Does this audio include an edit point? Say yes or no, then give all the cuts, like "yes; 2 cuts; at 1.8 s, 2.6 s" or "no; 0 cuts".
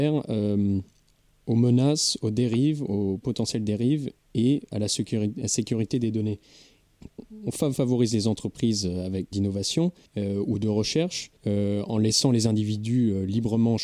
yes; 4 cuts; at 7.7 s, 9.3 s, 10.1 s, 11.4 s